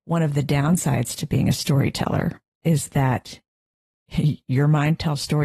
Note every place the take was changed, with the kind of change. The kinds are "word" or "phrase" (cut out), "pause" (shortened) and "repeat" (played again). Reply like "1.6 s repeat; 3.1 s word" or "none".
none